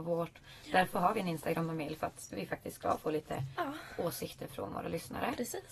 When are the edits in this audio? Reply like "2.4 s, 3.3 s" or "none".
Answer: none